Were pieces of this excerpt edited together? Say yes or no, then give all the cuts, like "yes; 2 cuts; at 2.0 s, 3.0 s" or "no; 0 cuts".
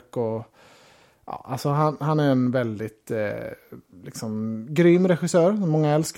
no; 0 cuts